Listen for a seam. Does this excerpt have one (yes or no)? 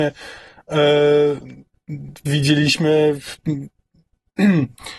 no